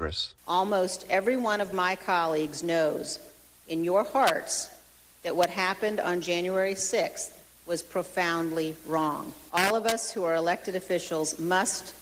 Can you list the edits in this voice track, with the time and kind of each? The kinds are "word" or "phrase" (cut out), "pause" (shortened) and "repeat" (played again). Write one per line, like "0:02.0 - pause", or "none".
none